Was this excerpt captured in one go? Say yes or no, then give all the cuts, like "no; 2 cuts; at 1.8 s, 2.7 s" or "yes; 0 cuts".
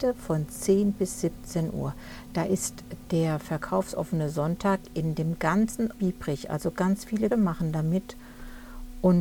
no; 2 cuts; at 6.0 s, 7.3 s